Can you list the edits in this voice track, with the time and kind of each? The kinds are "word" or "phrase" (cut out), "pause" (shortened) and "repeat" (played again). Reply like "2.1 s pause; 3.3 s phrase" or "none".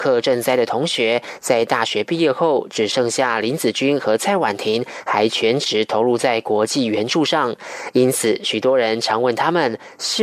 none